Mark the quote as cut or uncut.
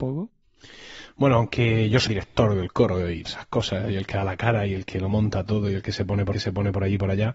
cut